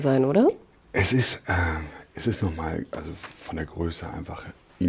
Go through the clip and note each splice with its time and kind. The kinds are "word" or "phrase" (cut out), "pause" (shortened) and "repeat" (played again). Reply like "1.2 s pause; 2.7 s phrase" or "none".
none